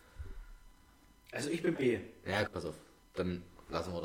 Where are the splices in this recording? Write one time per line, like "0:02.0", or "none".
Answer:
0:01.7
0:02.5